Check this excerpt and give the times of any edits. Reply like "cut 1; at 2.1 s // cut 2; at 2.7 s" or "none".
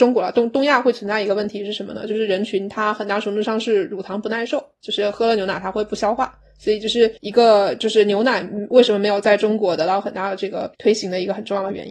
cut 1; at 7.2 s // cut 2; at 10.7 s